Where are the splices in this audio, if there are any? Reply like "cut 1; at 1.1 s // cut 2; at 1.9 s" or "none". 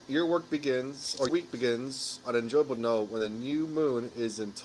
cut 1; at 1.3 s